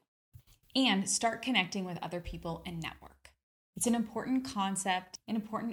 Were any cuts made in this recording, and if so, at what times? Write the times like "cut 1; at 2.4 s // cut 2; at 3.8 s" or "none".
none